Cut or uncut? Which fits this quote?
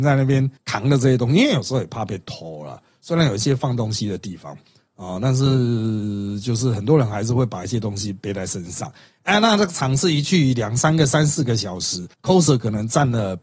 uncut